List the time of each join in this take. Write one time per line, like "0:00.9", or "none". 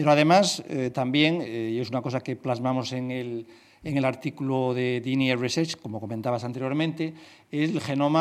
none